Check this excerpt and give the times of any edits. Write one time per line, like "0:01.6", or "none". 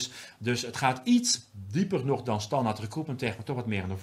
none